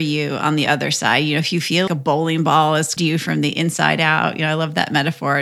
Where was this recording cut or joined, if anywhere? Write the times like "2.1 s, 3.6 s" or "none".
1.9 s, 3.0 s

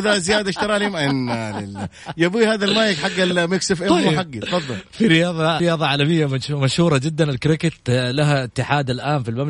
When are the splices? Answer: 5.6 s

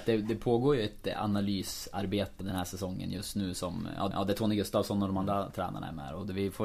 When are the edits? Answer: 2.4 s, 4.1 s

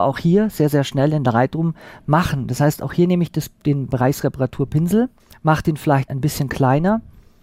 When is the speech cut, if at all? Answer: 3.9 s, 5.2 s, 6.1 s

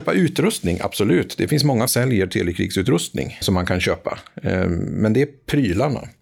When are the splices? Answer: 1.9 s, 3.4 s

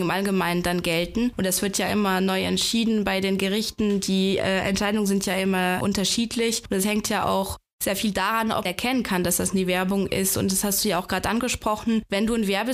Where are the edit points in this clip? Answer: 8.7 s

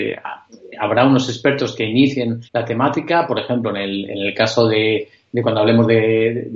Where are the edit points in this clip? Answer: 2.5 s

